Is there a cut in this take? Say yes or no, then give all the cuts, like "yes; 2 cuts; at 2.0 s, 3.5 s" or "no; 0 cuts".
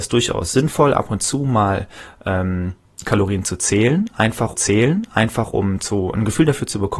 yes; 1 cut; at 4.5 s